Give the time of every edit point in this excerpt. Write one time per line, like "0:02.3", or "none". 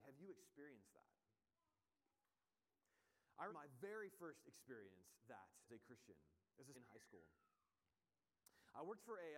0:03.5
0:05.2
0:05.7
0:06.7